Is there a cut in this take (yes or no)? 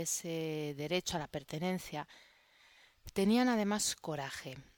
no